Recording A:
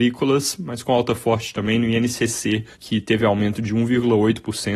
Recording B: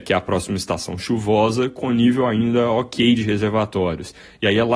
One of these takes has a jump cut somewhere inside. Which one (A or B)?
A